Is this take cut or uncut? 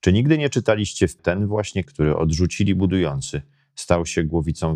cut